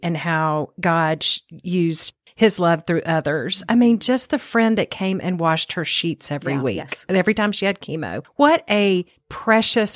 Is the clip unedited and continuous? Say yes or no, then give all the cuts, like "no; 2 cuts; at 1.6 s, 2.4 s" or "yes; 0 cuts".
yes; 0 cuts